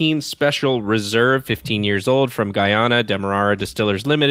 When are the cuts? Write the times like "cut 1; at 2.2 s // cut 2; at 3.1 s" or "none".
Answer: none